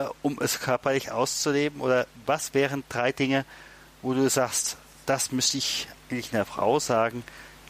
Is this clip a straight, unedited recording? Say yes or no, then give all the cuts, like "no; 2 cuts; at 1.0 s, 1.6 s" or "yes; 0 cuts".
yes; 0 cuts